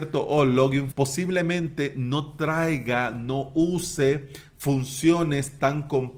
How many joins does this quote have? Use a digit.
1